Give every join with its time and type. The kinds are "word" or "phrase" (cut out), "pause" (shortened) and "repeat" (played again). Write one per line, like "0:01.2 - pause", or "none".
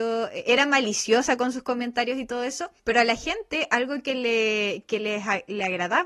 0:02.8 - pause